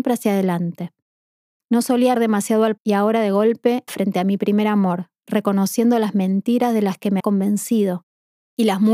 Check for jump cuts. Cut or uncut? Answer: cut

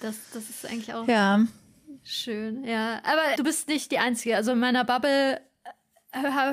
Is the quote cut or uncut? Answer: cut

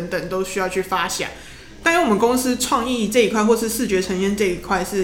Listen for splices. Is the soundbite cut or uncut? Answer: uncut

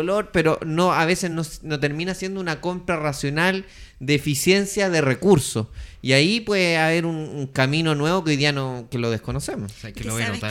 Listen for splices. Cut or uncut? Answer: uncut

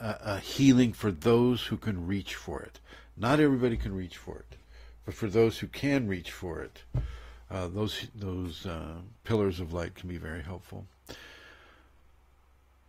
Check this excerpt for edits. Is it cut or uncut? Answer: uncut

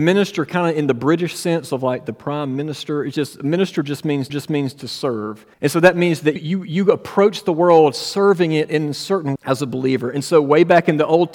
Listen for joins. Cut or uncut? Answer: cut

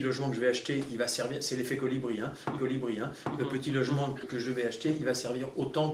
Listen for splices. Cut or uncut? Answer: cut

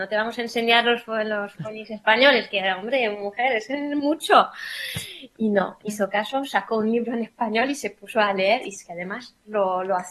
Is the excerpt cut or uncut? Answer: cut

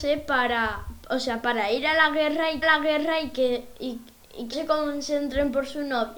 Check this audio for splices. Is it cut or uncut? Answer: cut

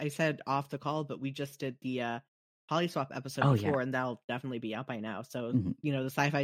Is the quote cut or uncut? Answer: uncut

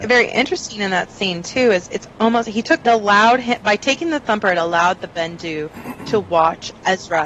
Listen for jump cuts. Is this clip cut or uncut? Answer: cut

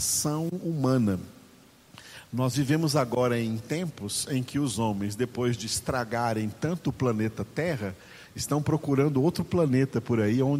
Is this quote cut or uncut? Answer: uncut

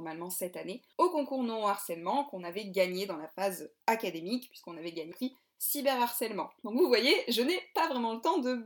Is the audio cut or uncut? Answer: cut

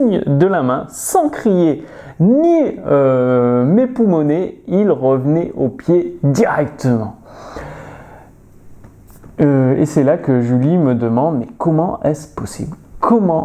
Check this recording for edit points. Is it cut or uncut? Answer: uncut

